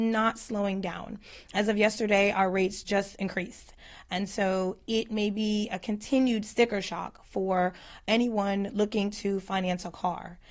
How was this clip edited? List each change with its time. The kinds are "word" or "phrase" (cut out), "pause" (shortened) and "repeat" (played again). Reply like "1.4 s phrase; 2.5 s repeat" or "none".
none